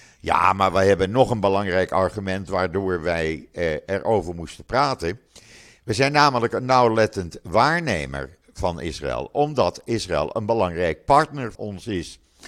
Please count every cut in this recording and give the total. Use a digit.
1